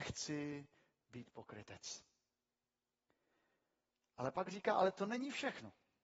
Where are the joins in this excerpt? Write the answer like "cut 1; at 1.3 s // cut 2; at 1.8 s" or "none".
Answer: none